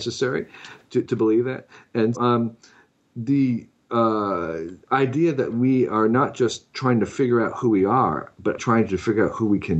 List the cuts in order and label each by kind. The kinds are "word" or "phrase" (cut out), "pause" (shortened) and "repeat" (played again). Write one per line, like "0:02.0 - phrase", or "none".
0:01.0 - word
0:02.1 - word
0:08.6 - word

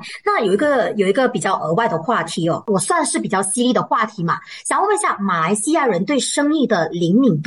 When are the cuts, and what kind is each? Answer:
none

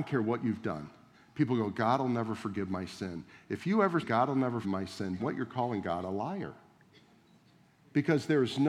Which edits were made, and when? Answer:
0:04.0 - word
0:04.6 - word
0:05.2 - word

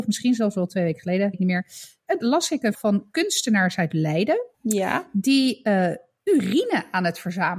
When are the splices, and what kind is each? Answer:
0:01.3 - word
0:02.2 - phrase
0:02.7 - word
0:04.5 - pause

